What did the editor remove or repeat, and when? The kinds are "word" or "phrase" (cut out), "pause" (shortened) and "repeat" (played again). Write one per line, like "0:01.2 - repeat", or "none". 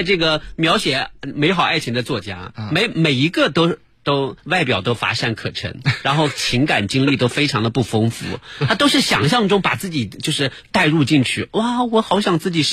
0:04.4 - pause